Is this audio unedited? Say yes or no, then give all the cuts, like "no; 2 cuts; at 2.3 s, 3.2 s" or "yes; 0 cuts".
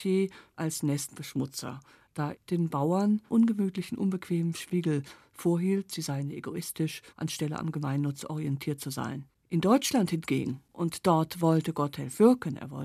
no; 4 cuts; at 2.3 s, 3.3 s, 7.1 s, 9.3 s